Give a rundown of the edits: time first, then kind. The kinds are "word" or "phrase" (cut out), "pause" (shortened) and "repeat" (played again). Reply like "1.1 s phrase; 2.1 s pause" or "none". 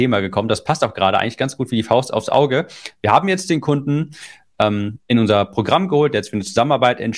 none